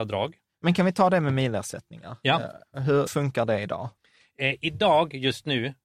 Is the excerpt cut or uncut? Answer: cut